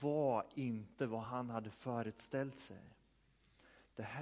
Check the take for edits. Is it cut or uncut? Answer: uncut